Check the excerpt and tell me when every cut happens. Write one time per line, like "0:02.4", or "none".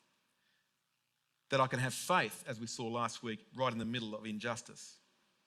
none